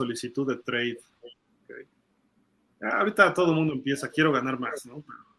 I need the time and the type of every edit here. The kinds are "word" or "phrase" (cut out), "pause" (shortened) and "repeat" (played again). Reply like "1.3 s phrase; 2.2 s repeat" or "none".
2.4 s pause